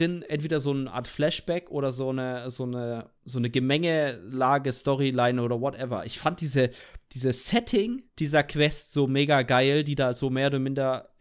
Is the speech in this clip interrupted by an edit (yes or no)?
yes